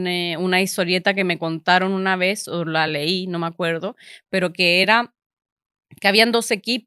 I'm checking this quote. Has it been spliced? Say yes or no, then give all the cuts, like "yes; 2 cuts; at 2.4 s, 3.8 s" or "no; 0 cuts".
no; 0 cuts